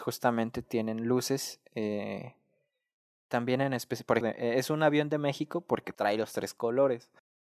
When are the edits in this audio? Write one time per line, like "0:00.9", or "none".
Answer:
0:04.2
0:05.9